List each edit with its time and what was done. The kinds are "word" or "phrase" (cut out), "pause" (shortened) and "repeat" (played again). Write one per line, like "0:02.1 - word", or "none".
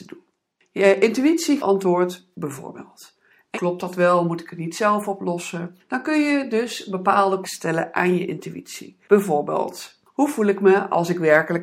0:01.6 - phrase
0:02.3 - phrase
0:03.5 - phrase
0:05.8 - pause
0:07.4 - word
0:09.0 - pause